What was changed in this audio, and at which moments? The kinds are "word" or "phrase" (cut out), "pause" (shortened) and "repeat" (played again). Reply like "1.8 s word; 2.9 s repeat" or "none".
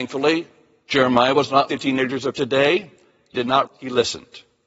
1.7 s word; 3.3 s word; 3.7 s word